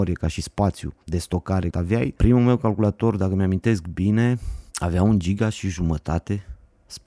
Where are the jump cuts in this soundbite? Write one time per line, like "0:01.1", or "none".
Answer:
0:01.0
0:01.7